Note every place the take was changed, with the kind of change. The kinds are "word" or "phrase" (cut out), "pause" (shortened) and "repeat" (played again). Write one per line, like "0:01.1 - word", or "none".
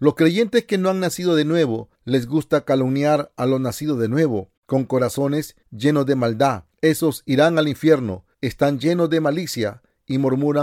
0:01.9 - pause
0:04.6 - pause
0:05.6 - pause
0:06.7 - pause
0:08.3 - pause